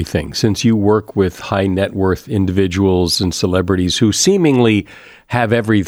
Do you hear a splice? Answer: no; 0 cuts

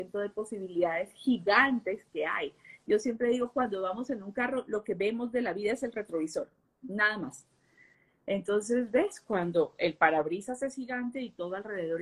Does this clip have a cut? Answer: no; 0 cuts

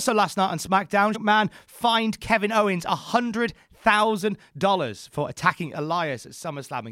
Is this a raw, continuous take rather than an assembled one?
no; 1 cut; at 1.1 s

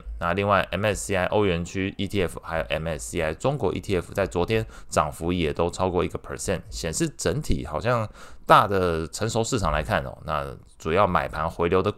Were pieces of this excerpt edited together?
no; 0 cuts

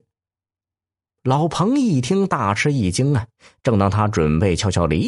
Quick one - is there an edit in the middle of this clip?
yes; 1 cut; at 3.4 s

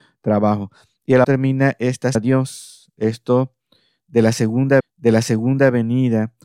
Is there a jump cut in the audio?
yes; 3 cuts; at 1.2 s, 2.1 s, 4.8 s

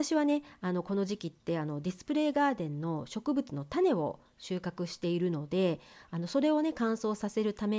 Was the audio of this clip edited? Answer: no; 0 cuts

